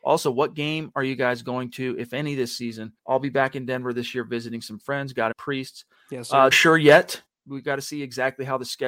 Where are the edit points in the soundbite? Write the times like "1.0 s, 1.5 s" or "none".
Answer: 3.0 s, 5.3 s, 6.5 s